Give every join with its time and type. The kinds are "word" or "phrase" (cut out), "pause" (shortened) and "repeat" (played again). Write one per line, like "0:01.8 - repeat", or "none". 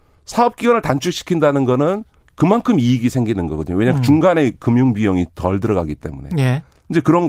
0:02.2 - pause